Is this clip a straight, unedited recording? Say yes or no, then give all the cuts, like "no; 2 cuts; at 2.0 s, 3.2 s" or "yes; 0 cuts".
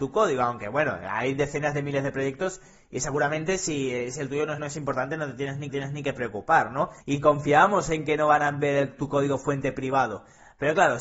no; 3 cuts; at 4.6 s, 5.7 s, 7.0 s